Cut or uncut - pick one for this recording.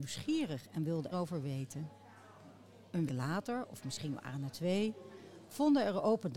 cut